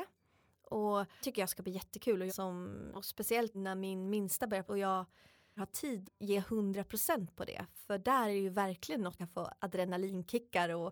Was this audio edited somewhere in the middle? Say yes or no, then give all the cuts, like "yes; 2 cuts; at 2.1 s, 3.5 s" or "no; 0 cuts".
yes; 8 cuts; at 1.2 s, 2.3 s, 2.9 s, 3.5 s, 4.7 s, 5.6 s, 6.0 s, 9.2 s